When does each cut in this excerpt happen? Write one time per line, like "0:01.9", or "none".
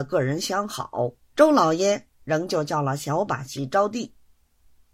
0:01.2

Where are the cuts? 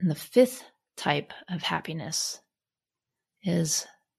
none

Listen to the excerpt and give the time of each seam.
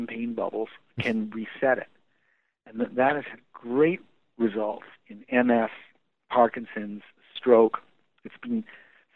none

